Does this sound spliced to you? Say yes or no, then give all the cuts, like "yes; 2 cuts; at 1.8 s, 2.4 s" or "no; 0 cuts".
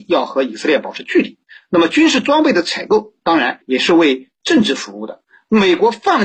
yes; 1 cut; at 3.6 s